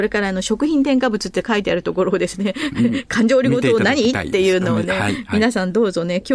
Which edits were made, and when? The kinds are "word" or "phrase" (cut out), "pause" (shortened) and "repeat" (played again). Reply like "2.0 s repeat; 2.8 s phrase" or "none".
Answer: none